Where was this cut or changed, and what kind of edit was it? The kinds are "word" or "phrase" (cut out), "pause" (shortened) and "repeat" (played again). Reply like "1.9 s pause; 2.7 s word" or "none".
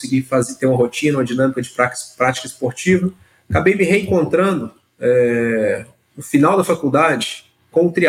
none